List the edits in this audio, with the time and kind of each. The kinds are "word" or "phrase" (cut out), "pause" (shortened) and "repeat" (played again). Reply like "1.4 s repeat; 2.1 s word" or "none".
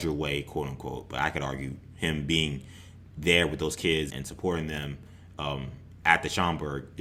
4.1 s word